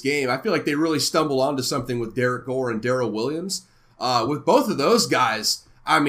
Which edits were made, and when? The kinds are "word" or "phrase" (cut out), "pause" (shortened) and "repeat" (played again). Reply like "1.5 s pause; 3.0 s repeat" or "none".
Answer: none